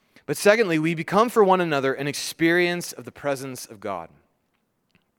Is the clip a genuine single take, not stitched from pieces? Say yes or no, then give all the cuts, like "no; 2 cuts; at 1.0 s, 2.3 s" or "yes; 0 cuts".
yes; 0 cuts